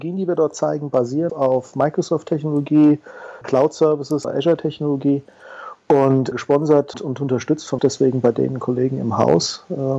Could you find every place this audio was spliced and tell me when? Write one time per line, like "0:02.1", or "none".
0:01.3
0:03.4
0:04.2
0:06.3
0:06.9
0:07.8